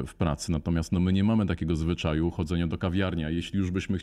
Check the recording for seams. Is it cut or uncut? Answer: uncut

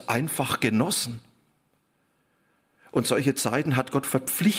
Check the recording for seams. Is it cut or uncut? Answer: uncut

